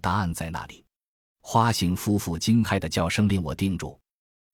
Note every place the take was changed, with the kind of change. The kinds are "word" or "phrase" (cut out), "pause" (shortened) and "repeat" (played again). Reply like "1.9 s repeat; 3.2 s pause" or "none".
none